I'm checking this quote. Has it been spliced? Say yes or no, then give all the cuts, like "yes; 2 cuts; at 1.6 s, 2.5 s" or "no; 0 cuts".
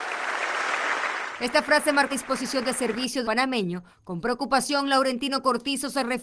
yes; 2 cuts; at 2.1 s, 3.2 s